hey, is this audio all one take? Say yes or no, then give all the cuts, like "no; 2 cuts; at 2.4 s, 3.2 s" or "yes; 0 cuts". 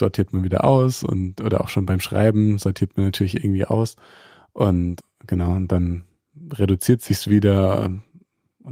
yes; 0 cuts